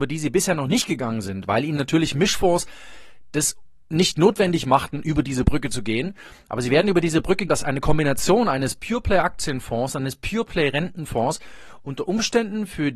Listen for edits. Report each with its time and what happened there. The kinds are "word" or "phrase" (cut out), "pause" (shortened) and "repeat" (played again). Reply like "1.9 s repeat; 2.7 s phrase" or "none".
3.8 s pause; 7.5 s word